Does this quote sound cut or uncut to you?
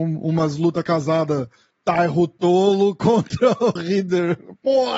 cut